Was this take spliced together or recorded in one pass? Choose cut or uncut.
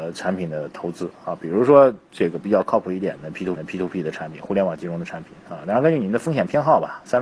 cut